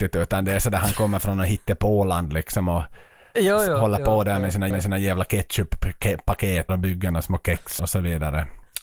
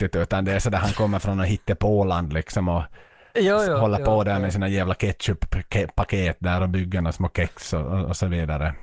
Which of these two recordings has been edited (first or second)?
first